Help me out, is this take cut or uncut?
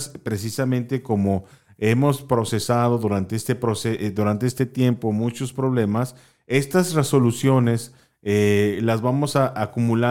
uncut